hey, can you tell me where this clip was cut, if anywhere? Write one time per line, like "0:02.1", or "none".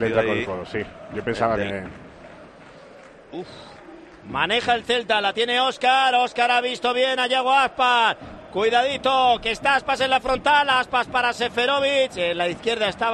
none